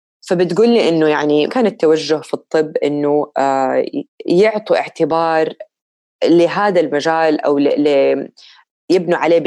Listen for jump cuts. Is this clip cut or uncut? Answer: cut